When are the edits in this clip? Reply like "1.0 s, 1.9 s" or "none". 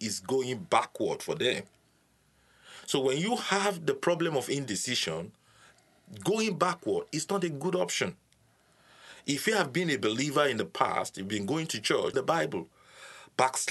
12.1 s